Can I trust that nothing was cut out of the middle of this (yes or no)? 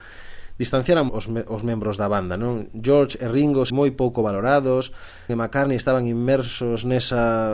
no